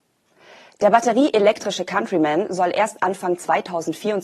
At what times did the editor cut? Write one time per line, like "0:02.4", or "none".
none